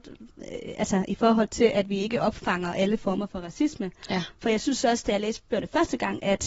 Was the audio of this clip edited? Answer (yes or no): no